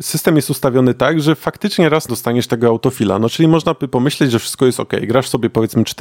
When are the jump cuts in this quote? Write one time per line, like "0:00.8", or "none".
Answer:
0:02.1